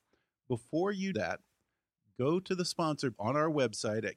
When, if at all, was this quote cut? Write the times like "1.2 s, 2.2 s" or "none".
1.1 s, 3.1 s

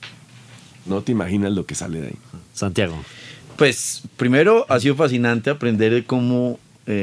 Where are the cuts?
none

